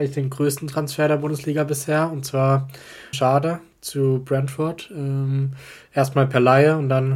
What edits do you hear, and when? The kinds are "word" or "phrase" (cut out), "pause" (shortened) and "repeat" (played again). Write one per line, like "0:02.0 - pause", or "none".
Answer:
0:03.1 - phrase